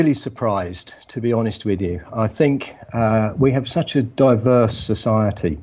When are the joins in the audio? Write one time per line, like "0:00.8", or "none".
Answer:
none

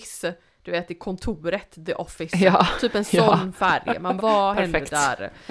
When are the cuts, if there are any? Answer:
0:04.2

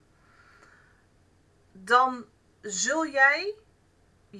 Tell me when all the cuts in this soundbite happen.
none

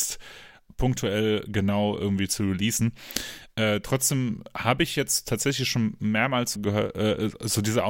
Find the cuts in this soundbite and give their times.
0:06.6

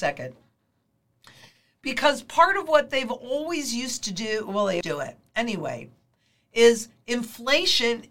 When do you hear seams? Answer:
0:04.8

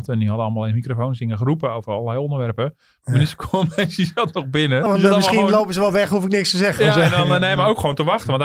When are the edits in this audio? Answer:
0:04.9

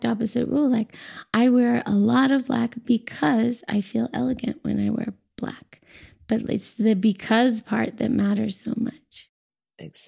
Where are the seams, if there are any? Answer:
none

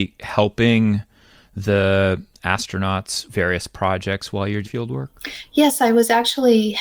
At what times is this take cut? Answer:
0:03.3
0:04.6

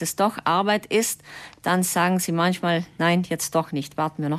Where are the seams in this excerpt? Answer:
none

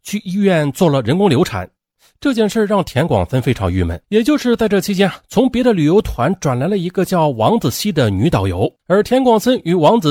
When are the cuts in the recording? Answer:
0:04.0
0:08.8

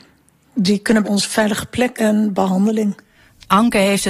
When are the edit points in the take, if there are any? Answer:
0:01.0
0:01.9

